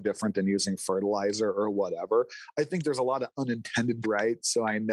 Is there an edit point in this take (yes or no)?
yes